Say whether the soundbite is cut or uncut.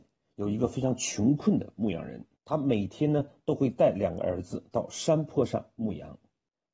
cut